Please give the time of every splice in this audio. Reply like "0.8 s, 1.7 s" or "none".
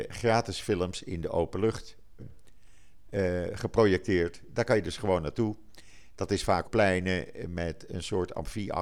2.2 s, 6.6 s